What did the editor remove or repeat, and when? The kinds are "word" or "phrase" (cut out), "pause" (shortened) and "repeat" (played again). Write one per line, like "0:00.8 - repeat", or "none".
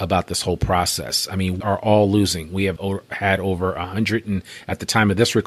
0:01.6 - word
0:02.8 - word

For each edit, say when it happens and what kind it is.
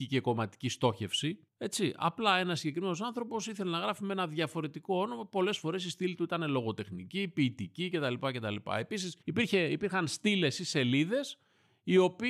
0:01.5 - pause
0:09.2 - pause

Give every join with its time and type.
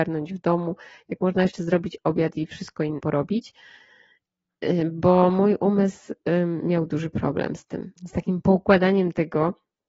0:03.0 - word
0:08.0 - pause

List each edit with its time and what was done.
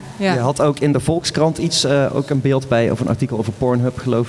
none

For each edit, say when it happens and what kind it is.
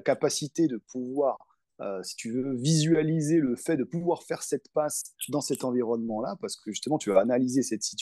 none

